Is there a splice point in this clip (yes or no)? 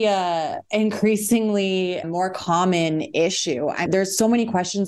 yes